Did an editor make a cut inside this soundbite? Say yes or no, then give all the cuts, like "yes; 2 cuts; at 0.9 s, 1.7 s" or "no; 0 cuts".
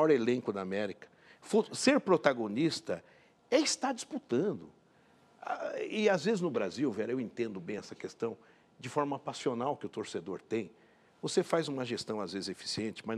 no; 0 cuts